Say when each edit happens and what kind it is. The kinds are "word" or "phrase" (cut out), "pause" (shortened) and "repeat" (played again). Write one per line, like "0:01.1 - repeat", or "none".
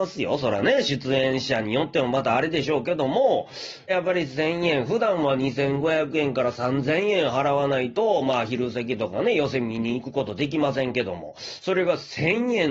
0:03.9 - phrase